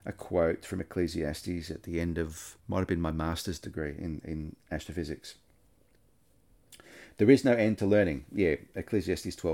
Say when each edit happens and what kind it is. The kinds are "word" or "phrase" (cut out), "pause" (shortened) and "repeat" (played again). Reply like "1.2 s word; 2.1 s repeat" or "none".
2.6 s pause

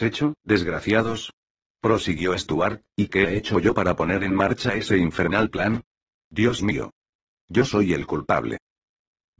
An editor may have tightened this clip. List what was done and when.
1.5 s pause

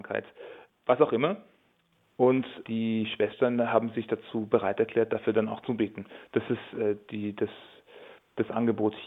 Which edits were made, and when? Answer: none

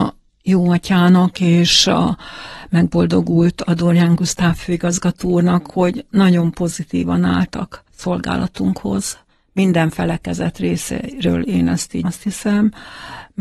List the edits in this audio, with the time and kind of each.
7.9 s pause; 12.0 s word

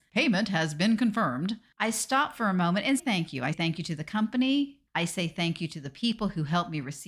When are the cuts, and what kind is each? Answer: 3.0 s word; 3.5 s word

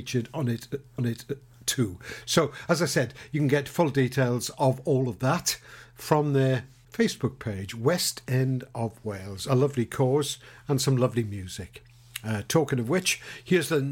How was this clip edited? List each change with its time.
1.0 s repeat

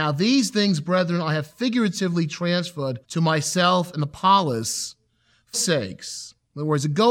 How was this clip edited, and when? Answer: 3.0 s pause; 5.5 s word

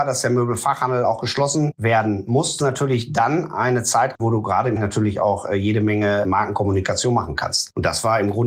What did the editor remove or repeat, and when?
2.6 s word; 4.1 s word; 4.8 s word

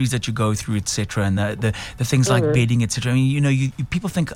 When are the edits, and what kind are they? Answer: none

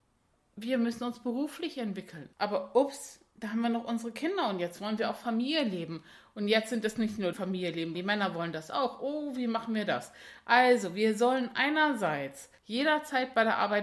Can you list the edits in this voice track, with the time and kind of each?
2.3 s pause; 7.3 s phrase; 7.9 s word; 12.6 s pause

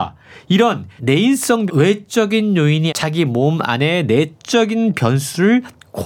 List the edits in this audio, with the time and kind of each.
1.0 s word; 1.7 s word; 2.9 s word

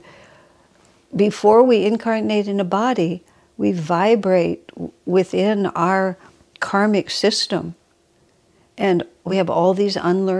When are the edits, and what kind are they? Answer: none

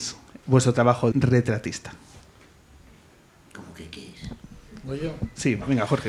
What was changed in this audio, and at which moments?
1.1 s word

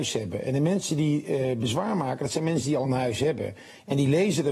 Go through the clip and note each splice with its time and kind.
none

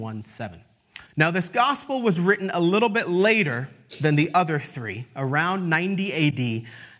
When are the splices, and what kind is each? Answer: 1.1 s pause

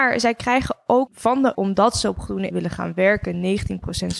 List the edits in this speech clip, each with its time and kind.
1.1 s word; 1.5 s word; 2.5 s word

